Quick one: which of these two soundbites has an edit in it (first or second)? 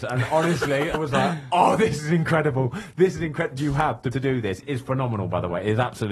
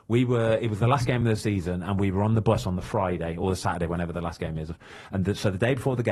first